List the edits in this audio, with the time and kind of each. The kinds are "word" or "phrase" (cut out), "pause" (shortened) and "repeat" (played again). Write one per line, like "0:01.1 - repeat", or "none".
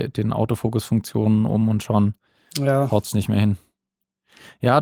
none